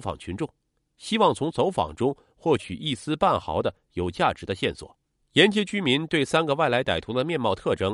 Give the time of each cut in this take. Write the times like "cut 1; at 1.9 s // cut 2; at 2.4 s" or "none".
cut 1; at 5.2 s

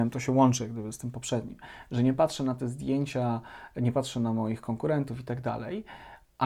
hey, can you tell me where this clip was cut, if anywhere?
none

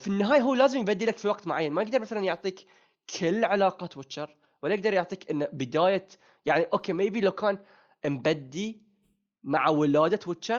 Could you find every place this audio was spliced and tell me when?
none

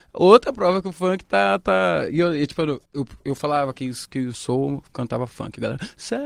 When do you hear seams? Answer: cut 1; at 2.9 s

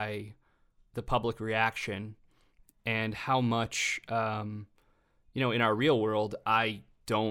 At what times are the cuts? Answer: none

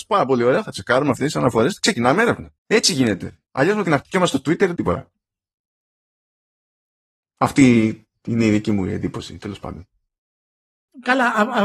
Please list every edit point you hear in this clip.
cut 1; at 2.6 s // cut 2; at 3.5 s // cut 3; at 3.8 s // cut 4; at 4.7 s

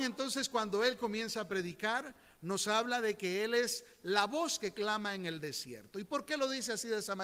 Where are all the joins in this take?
none

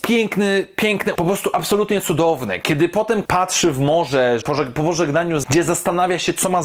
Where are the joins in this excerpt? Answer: cut 1; at 1.2 s // cut 2; at 3.3 s // cut 3; at 4.4 s // cut 4; at 5.4 s

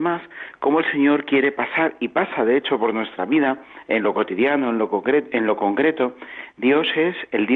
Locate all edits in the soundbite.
none

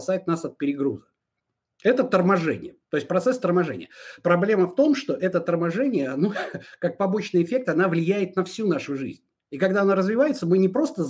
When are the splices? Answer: cut 1; at 2.8 s // cut 2; at 9.4 s

